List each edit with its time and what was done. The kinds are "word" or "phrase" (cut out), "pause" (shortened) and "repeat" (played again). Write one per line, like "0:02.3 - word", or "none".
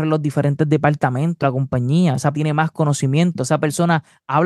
0:01.4 - word
0:02.3 - word